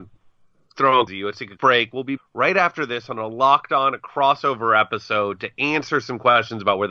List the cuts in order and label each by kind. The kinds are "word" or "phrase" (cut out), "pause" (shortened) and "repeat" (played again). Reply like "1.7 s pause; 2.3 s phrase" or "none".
1.1 s word; 1.6 s word; 2.2 s word